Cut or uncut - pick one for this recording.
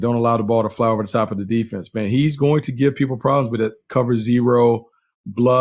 uncut